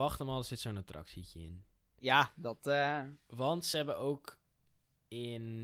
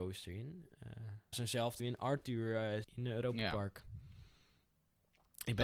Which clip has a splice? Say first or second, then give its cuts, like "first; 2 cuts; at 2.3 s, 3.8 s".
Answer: second; 3 cuts; at 1.3 s, 1.8 s, 2.8 s